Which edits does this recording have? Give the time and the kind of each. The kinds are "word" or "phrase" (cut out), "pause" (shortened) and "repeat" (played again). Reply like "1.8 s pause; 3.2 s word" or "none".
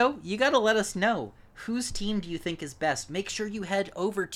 none